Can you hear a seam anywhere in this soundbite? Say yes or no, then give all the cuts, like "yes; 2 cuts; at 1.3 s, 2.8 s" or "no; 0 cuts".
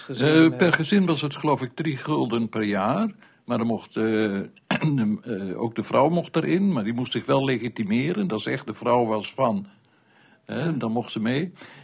no; 0 cuts